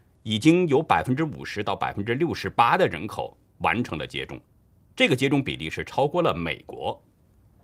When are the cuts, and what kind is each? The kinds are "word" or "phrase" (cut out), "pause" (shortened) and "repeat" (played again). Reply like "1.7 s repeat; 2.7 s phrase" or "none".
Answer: none